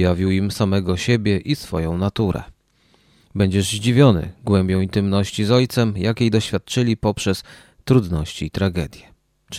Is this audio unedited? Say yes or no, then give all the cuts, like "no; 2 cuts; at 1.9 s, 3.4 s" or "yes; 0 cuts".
yes; 0 cuts